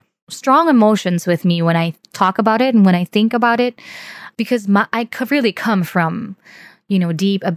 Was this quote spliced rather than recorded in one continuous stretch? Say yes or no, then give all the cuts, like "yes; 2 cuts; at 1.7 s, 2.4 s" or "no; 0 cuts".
no; 0 cuts